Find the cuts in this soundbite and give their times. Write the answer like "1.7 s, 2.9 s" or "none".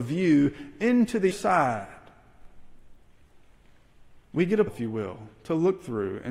1.3 s, 4.7 s